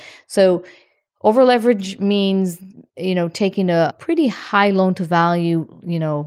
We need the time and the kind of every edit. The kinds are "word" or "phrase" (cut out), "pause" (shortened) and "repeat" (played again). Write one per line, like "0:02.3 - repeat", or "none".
none